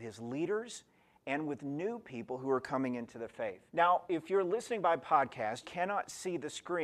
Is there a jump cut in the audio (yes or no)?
yes